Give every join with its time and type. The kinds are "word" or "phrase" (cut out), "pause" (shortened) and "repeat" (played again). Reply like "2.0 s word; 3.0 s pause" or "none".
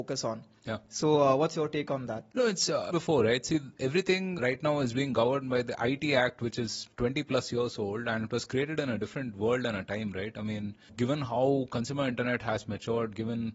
2.3 s pause; 2.9 s phrase